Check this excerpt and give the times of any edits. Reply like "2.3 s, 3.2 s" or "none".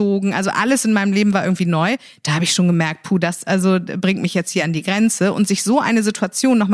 none